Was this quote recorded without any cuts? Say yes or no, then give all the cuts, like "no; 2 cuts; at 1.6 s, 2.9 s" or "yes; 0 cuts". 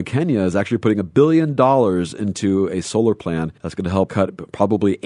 no; 2 cuts; at 3.6 s, 4.1 s